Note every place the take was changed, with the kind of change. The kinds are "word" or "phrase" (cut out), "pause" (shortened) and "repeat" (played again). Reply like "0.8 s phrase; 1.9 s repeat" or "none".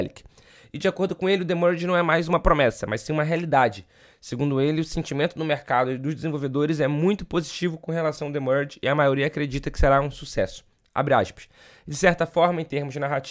none